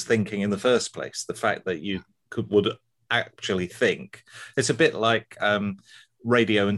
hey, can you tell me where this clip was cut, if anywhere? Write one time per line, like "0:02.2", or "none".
none

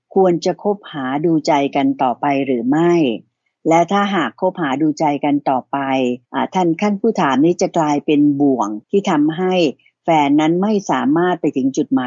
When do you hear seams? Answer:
0:06.2
0:08.8

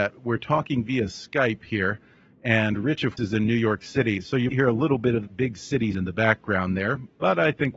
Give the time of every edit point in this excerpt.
0:03.2
0:04.5
0:05.3
0:05.9

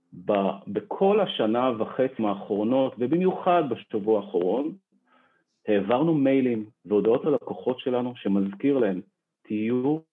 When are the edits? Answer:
0:02.2
0:06.8

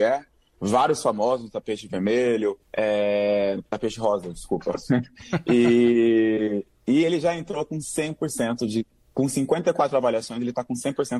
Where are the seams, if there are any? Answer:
0:02.6

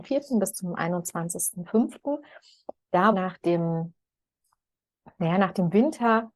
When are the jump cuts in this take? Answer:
0:03.1

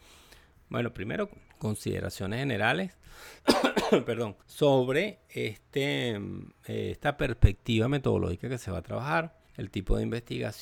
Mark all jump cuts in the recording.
0:01.5
0:03.4
0:04.4
0:09.5

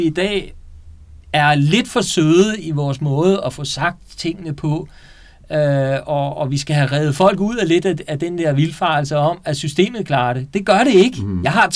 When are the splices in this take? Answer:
none

